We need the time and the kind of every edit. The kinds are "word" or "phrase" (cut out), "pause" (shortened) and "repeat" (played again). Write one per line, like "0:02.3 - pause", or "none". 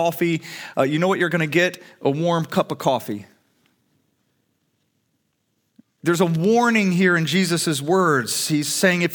none